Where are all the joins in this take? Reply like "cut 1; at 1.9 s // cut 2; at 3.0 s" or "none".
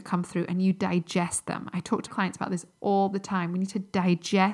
cut 1; at 2.1 s

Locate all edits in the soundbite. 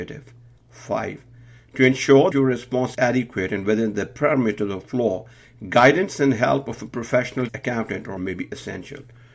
cut 1; at 2.3 s // cut 2; at 2.9 s // cut 3; at 7.5 s // cut 4; at 8.2 s

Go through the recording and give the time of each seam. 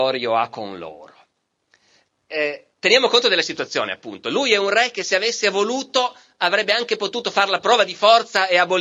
cut 1; at 2.7 s

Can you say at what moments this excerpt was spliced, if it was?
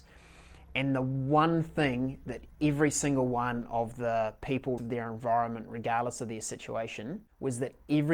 cut 1; at 4.8 s

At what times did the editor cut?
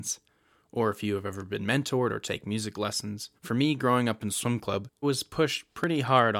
cut 1; at 3.4 s // cut 2; at 5.0 s

